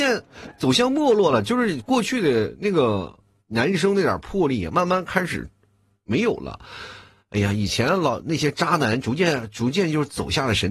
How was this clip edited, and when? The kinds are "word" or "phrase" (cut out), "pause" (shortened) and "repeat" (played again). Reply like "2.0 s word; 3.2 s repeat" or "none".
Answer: none